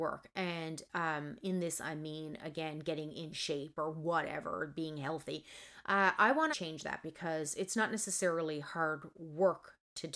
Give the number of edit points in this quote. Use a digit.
1